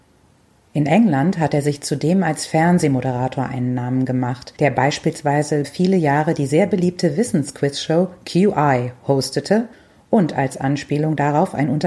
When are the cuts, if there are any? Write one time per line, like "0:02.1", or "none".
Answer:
0:05.6